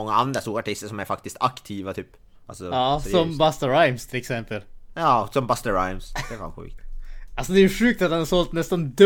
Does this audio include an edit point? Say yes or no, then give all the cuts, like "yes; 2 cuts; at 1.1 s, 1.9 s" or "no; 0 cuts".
yes; 1 cut; at 2.3 s